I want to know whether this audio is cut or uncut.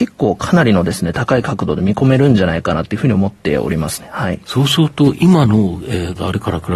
uncut